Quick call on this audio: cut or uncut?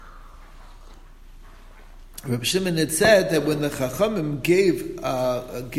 uncut